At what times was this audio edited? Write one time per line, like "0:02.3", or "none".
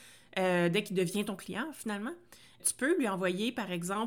0:02.6